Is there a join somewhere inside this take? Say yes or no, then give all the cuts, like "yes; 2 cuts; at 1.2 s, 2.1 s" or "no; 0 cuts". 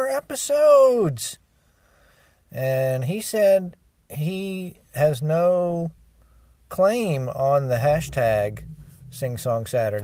no; 0 cuts